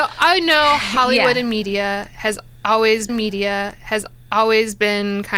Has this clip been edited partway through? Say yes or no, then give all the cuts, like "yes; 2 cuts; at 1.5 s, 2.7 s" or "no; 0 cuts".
yes; 1 cut; at 3.1 s